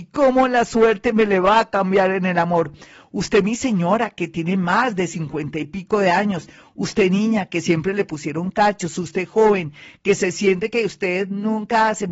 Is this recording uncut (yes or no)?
yes